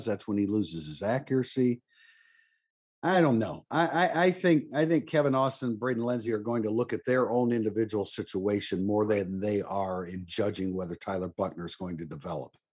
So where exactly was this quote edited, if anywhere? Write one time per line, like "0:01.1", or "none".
none

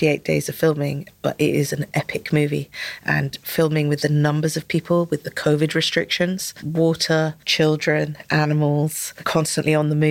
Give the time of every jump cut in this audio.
none

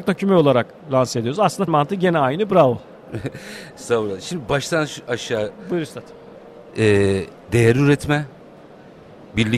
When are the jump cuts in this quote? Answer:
0:01.7
0:07.4

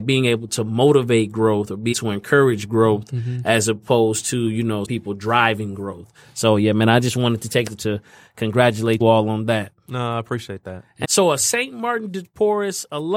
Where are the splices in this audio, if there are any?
0:01.9
0:04.8
0:07.8
0:09.0
0:11.0

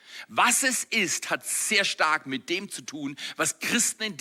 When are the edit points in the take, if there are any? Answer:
none

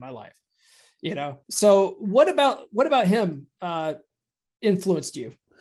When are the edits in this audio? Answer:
0:01.4
0:03.5

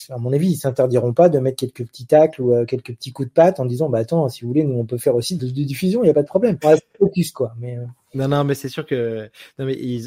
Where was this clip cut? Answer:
0:05.4
0:06.6

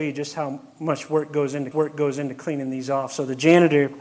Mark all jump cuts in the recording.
0:01.7

